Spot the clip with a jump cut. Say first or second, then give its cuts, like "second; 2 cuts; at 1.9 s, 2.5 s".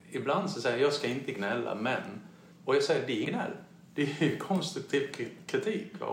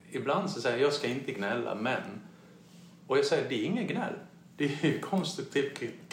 first; 2 cuts; at 2.5 s, 3.2 s